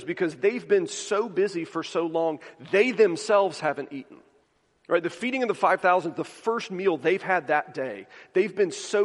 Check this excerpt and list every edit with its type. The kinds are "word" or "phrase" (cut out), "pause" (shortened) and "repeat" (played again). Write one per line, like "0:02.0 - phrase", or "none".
0:04.4 - pause